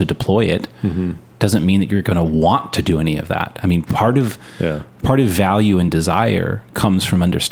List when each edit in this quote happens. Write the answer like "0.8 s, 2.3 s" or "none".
none